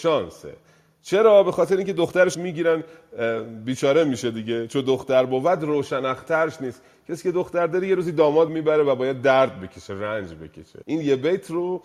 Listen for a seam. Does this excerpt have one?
yes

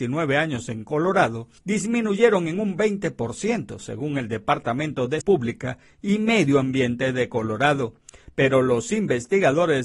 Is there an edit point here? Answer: yes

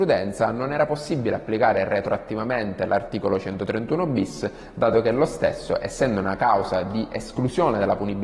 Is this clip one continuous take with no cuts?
yes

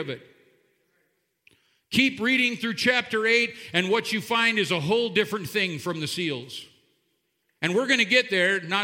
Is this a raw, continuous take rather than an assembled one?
yes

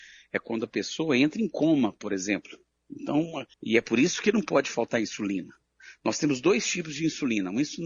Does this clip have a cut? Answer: yes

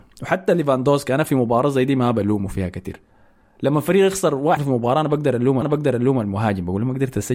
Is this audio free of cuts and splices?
no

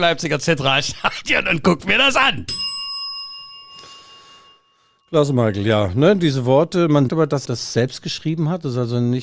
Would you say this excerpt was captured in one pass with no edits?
no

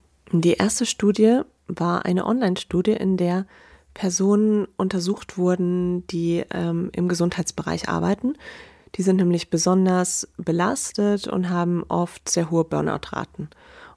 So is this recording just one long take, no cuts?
yes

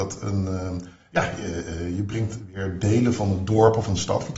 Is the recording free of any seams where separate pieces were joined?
yes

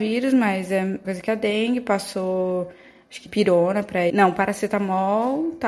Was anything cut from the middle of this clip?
yes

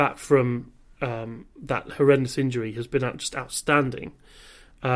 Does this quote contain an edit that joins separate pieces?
no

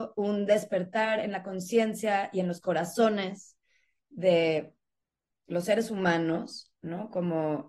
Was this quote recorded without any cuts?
yes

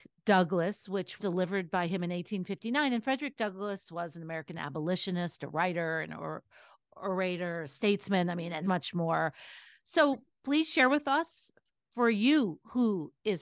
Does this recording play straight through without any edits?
no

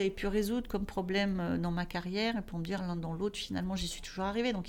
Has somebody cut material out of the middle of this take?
no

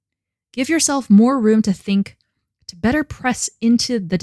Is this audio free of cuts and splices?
yes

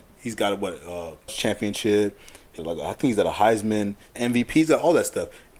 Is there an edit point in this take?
yes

